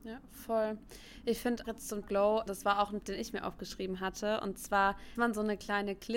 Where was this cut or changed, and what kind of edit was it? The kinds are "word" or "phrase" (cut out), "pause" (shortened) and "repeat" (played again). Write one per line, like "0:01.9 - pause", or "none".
0:01.6 - word
0:02.0 - word
0:02.5 - word
0:03.0 - word
0:05.2 - word